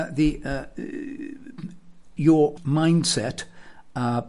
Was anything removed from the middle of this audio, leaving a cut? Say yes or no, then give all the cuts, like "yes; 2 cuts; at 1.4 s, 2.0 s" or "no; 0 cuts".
yes; 2 cuts; at 2.2 s, 2.6 s